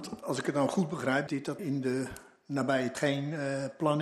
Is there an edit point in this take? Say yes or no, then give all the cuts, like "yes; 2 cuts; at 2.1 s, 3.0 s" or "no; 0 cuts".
yes; 3 cuts; at 1.3 s, 1.6 s, 2.9 s